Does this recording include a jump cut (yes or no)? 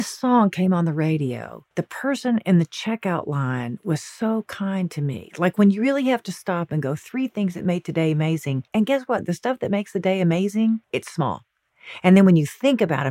yes